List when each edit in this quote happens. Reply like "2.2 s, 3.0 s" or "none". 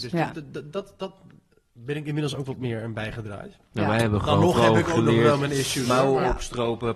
none